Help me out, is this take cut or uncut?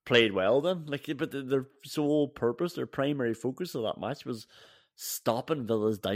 uncut